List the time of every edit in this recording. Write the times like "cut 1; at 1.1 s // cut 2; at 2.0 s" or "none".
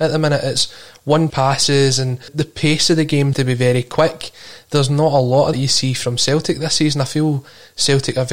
cut 1; at 1.3 s // cut 2; at 2.3 s // cut 3; at 3.3 s // cut 4; at 5.5 s